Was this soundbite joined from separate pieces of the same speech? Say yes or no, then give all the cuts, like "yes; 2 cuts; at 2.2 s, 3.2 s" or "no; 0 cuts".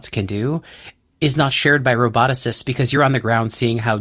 no; 0 cuts